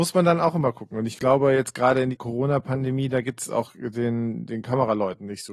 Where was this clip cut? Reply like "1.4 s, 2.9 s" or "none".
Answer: 2.1 s